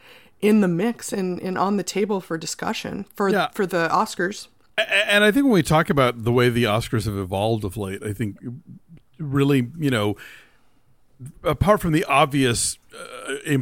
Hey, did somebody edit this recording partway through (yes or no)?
no